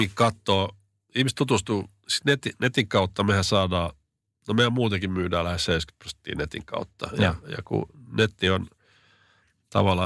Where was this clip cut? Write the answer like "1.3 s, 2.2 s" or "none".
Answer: none